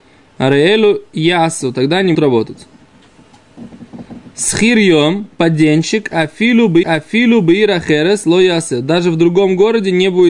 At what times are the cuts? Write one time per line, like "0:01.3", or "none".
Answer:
0:02.1
0:06.8